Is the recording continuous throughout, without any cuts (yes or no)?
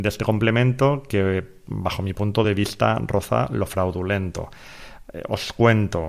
yes